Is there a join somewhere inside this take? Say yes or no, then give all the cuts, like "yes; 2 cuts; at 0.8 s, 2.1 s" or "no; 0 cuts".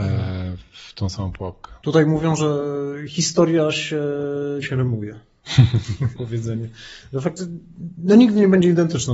yes; 2 cuts; at 4.6 s, 6.1 s